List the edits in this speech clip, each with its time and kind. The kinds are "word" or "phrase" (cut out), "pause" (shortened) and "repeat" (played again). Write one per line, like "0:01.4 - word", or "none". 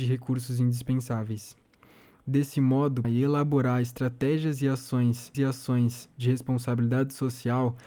0:03.0 - word
0:05.3 - repeat